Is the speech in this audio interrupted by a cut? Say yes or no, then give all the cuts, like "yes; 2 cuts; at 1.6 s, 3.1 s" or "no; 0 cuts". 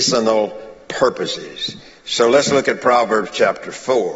no; 0 cuts